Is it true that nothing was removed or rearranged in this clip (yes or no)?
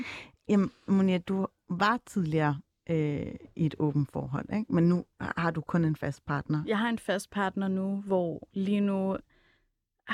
yes